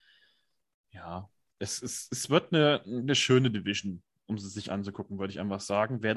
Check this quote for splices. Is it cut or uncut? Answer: uncut